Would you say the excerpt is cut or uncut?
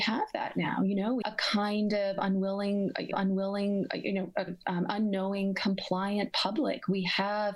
cut